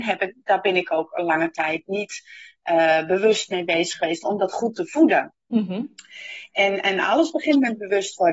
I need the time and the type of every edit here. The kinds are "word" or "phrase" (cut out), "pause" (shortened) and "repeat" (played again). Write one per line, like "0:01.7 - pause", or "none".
none